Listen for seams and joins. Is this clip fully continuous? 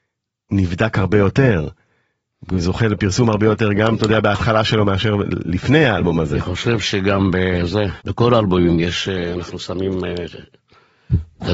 no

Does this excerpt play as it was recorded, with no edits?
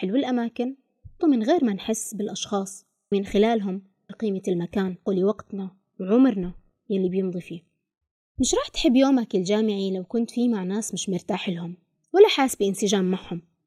no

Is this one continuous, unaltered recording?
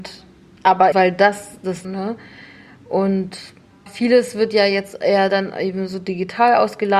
no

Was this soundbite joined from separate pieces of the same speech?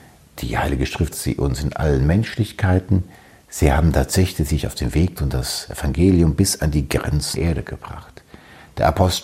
yes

